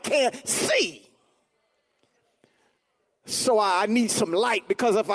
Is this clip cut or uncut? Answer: uncut